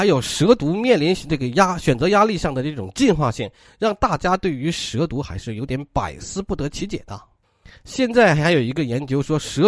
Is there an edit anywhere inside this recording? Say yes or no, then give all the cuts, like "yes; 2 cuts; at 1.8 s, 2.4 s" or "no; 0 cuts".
no; 0 cuts